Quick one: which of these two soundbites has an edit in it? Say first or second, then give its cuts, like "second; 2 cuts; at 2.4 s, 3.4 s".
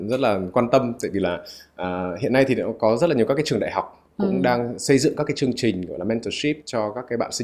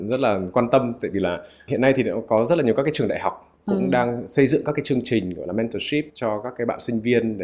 second; 1 cut; at 1.7 s